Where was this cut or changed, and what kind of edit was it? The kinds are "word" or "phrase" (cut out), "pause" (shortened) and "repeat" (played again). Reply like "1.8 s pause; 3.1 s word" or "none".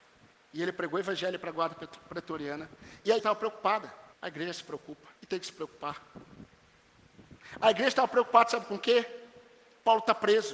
3.2 s word; 4.1 s pause; 5.2 s pause